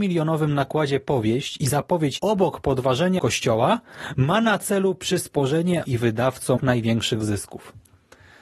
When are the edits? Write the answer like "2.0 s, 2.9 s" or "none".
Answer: 2.2 s, 3.2 s, 5.8 s, 6.6 s